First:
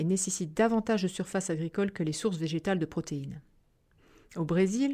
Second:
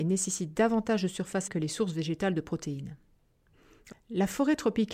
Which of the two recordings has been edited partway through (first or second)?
second